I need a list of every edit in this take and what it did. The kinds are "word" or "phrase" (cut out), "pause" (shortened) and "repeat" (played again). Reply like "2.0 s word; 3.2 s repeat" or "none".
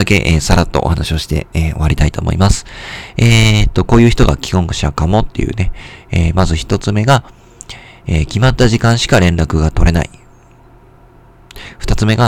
none

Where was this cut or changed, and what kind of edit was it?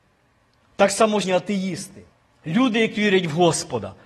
1.2 s word; 2.1 s pause; 3.0 s word

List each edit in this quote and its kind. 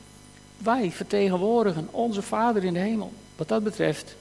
3.2 s pause

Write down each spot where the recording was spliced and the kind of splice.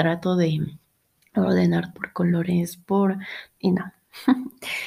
1.9 s word; 3.6 s word

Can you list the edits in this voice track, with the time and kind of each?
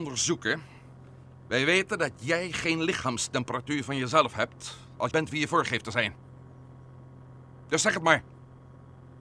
5.1 s phrase

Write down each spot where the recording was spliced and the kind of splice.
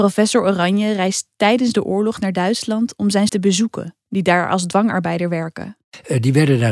3.3 s word

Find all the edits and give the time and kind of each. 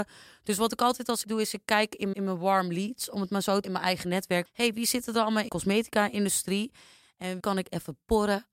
1.2 s word; 2.1 s word; 3.6 s word; 4.5 s word; 5.5 s word; 7.4 s word

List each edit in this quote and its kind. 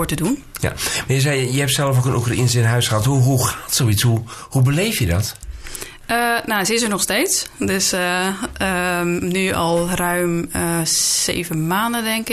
none

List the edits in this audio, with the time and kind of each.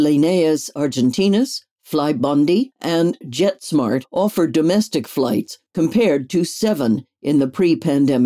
5.7 s pause

